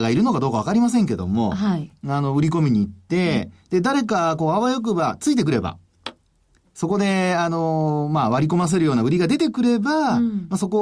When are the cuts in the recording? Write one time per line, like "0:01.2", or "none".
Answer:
0:06.6